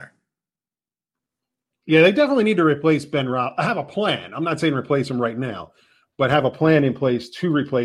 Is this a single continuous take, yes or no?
yes